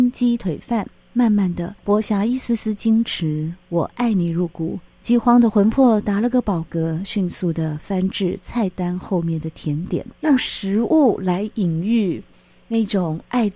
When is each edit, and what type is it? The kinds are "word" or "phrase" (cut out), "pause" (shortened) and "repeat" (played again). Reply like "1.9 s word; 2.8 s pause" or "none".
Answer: 1.8 s pause; 4.9 s pause; 10.2 s pause